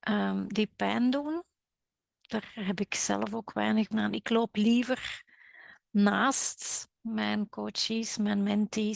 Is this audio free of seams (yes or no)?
no